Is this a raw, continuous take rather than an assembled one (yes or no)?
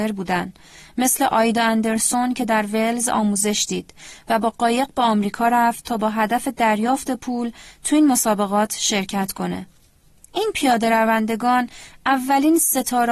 yes